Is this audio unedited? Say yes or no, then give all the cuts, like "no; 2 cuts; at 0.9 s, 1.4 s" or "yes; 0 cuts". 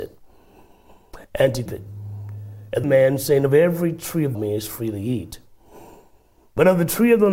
no; 4 cuts; at 1.2 s, 1.7 s, 2.8 s, 4.3 s